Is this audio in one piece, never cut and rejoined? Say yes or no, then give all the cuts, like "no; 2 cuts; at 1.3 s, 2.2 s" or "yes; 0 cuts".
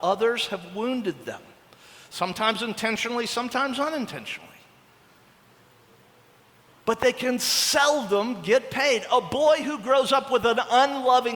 yes; 0 cuts